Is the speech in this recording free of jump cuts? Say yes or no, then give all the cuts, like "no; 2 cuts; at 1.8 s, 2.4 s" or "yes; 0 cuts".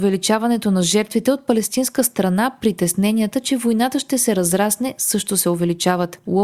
yes; 0 cuts